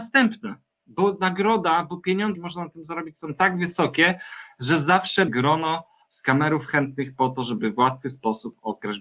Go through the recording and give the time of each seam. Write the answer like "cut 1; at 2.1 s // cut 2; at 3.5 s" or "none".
cut 1; at 2.3 s // cut 2; at 5.3 s